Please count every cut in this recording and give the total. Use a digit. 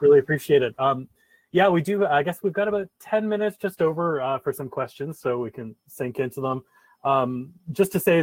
0